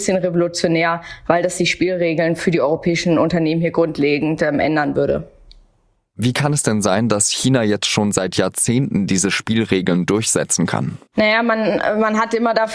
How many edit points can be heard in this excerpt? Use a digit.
1